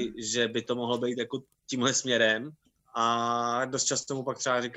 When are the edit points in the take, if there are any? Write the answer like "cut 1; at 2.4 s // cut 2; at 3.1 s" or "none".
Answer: cut 1; at 2.7 s